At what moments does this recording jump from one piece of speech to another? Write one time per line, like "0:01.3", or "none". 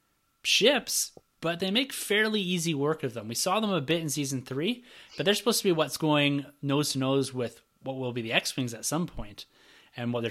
none